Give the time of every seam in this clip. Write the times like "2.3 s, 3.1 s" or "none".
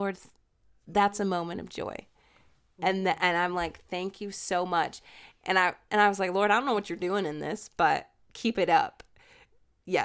none

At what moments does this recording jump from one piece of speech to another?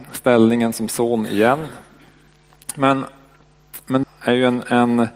4.0 s

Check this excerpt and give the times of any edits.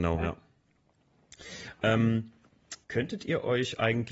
2.8 s

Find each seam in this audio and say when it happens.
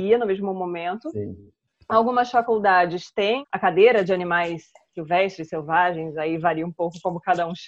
none

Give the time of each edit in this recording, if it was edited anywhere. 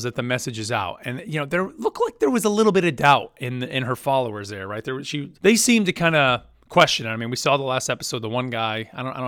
5.4 s

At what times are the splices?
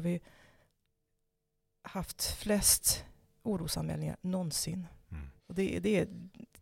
5.4 s

